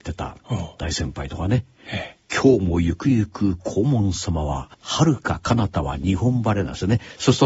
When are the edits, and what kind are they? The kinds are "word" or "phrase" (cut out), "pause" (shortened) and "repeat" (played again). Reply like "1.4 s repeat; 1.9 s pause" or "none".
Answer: 4.7 s pause